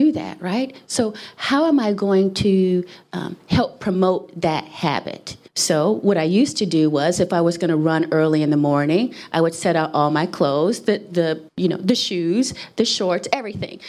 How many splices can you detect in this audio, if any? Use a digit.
2